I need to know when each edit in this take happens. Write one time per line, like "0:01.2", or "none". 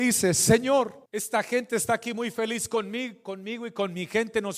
0:01.1